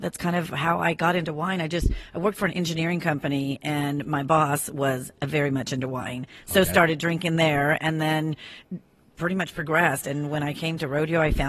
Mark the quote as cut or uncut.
uncut